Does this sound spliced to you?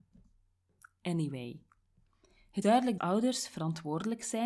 yes; 2 cuts; at 2.6 s, 3.0 s

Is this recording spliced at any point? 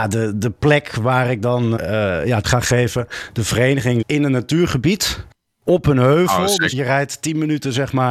yes; 4 cuts; at 1.8 s, 2.4 s, 4.0 s, 6.7 s

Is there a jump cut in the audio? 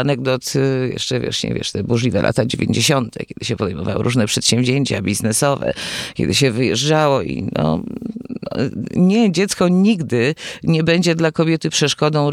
no; 0 cuts

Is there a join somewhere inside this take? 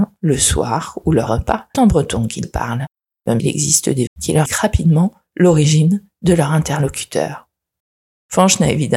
yes; 6 cuts; at 1.3 s, 1.7 s, 2.4 s, 3.4 s, 4.1 s, 4.5 s

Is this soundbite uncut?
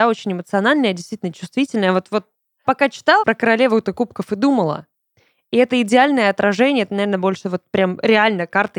no; 2 cuts; at 2.6 s, 3.2 s

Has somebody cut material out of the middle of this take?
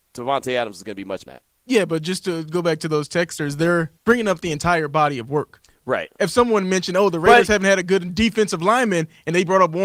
yes; 2 cuts; at 1.3 s, 4.0 s

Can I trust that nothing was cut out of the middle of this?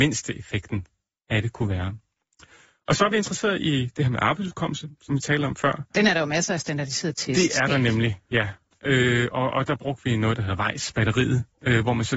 yes; 0 cuts

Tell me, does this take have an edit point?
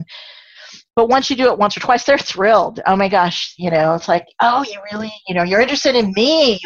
no; 0 cuts

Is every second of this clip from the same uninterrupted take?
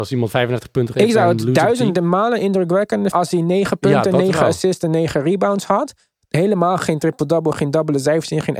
no; 2 cuts; at 0.9 s, 3.1 s

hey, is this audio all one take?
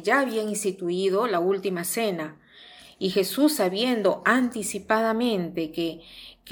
yes; 0 cuts

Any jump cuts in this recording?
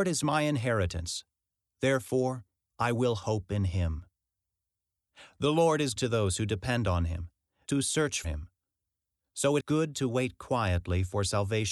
yes; 4 cuts; at 6.0 s, 7.7 s, 8.2 s, 9.6 s

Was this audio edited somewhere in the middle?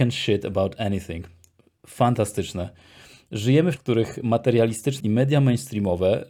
yes; 2 cuts; at 3.8 s, 5.0 s

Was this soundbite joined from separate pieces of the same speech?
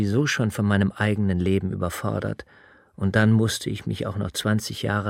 no; 0 cuts

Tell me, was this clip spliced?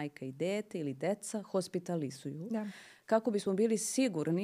no; 0 cuts

